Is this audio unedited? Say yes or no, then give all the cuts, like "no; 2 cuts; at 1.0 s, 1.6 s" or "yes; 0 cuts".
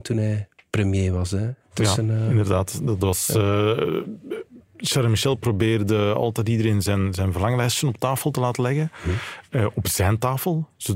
yes; 0 cuts